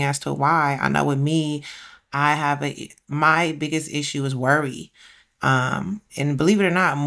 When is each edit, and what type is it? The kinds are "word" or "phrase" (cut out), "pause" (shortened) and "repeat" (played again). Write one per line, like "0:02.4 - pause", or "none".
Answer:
0:06.1 - word